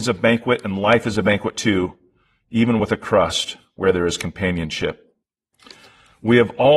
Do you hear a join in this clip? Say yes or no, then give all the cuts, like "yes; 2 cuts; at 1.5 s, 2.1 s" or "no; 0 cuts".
no; 0 cuts